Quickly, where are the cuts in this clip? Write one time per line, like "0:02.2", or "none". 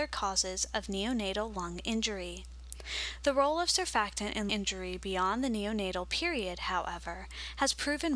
0:04.5